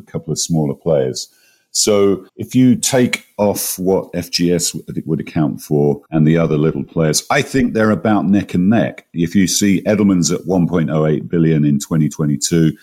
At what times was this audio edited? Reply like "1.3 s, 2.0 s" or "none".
2.3 s, 6.1 s